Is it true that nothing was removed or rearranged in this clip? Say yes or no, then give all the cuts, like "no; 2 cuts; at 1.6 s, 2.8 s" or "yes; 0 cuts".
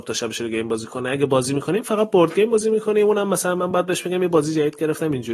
yes; 0 cuts